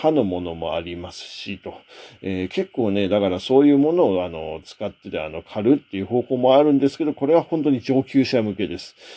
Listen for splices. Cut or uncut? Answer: uncut